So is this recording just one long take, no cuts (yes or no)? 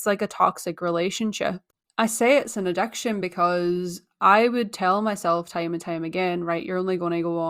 yes